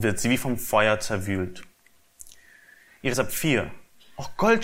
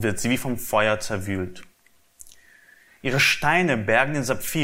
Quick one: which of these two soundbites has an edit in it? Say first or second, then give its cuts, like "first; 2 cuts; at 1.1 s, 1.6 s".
first; 1 cut; at 3.1 s